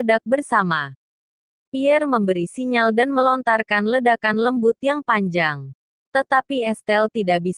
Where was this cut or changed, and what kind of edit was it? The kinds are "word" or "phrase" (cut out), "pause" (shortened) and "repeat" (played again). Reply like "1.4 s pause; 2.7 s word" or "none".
none